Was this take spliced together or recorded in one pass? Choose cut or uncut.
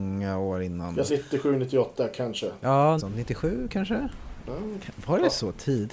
cut